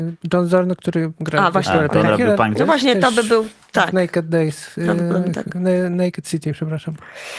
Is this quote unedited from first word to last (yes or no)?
yes